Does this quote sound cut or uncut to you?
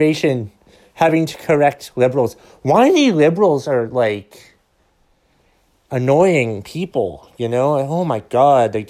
uncut